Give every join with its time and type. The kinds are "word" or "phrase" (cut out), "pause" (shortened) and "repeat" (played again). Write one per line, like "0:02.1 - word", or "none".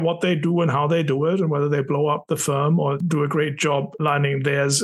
0:03.0 - word